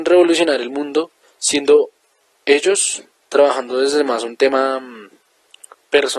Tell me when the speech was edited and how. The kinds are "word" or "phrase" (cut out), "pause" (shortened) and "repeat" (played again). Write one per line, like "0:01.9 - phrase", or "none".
0:01.2 - pause
0:03.2 - pause